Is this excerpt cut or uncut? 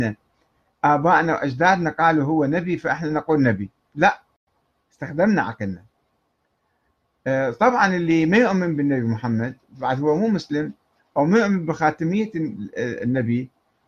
uncut